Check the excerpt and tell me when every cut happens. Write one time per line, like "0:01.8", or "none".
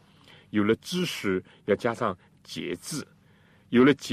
none